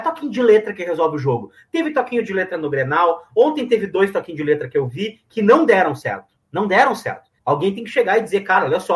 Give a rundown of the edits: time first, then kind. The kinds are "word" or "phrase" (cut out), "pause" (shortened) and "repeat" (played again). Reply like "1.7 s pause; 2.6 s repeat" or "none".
6.4 s pause; 7.4 s pause